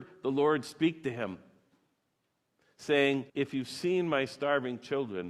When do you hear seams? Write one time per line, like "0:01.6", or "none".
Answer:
0:03.3